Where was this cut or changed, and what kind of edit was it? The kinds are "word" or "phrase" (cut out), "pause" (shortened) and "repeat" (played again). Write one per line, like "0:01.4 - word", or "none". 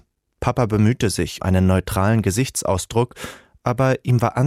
0:01.4 - word